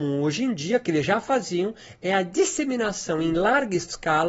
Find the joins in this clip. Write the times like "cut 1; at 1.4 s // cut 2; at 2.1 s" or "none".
none